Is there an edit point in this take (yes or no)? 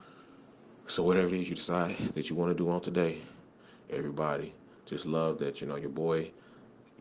no